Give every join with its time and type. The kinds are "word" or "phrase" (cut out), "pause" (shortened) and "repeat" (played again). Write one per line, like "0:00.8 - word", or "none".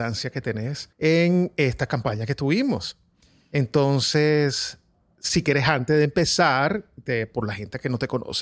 0:00.9 - pause